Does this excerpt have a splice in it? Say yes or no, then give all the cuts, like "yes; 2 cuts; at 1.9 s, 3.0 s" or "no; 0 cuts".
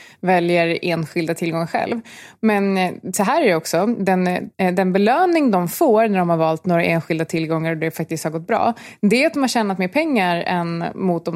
no; 0 cuts